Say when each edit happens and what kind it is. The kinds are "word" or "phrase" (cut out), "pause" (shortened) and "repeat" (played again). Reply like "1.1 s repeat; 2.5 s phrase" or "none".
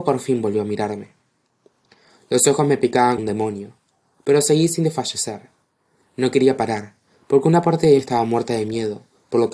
3.2 s word; 8.0 s word